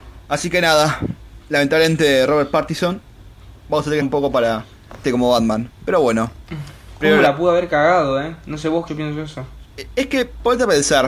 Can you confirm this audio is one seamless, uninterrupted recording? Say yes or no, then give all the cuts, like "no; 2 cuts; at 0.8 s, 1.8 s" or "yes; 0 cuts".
no; 3 cuts; at 4.0 s, 5.0 s, 8.9 s